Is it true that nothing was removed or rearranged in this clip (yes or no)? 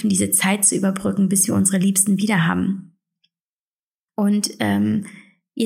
yes